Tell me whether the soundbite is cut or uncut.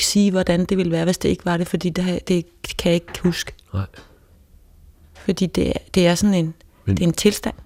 uncut